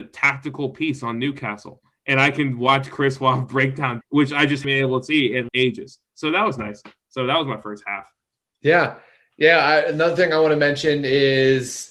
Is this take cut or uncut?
cut